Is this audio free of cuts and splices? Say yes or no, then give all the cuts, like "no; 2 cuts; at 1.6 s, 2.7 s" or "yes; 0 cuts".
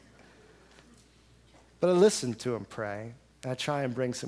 no; 1 cut; at 3.3 s